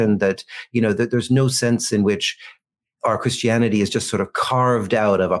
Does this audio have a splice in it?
no; 0 cuts

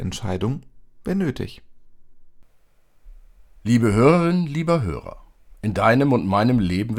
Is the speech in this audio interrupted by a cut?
no; 0 cuts

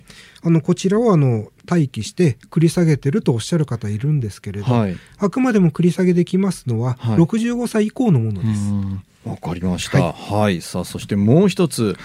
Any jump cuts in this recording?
yes; 1 cut; at 1.6 s

